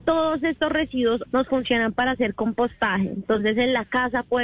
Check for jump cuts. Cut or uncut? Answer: cut